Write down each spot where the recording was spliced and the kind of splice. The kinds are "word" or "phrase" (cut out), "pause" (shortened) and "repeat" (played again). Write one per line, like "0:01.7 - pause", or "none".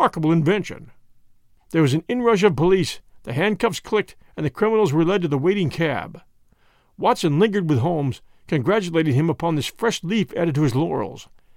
none

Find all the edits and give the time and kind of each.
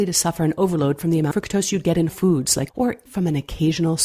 0:01.3 - word
0:02.1 - word
0:02.7 - word
0:03.1 - word

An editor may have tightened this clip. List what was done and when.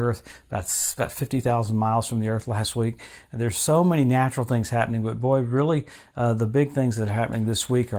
none

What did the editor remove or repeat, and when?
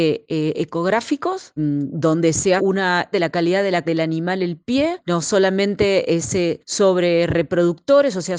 0:01.6 - word
0:02.6 - word
0:03.1 - word
0:03.8 - word
0:06.2 - word

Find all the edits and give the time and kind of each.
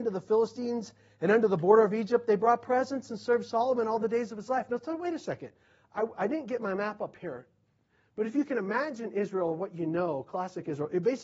none

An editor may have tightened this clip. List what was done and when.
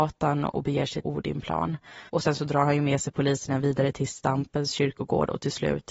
0:01.0 - word
0:02.1 - pause

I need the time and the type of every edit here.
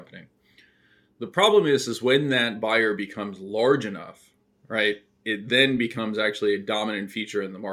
none

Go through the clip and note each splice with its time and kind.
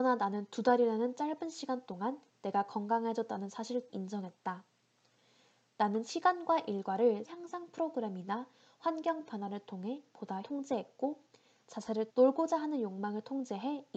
0:03.9 - word
0:07.3 - word
0:10.4 - word
0:12.1 - word

